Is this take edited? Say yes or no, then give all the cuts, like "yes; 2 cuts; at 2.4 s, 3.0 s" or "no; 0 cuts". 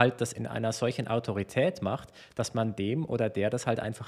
no; 0 cuts